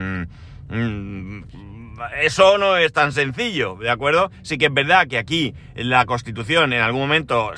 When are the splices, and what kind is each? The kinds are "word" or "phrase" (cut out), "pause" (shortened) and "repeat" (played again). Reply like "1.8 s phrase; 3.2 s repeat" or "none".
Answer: none